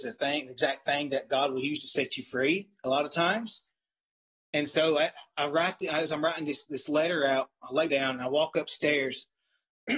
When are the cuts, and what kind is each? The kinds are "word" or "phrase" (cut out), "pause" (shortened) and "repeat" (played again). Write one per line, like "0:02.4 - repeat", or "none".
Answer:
0:07.9 - phrase